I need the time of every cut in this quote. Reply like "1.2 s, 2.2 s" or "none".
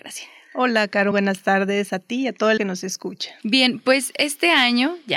1.1 s, 2.6 s